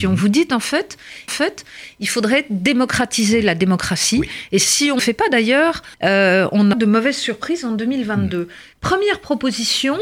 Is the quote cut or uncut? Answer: cut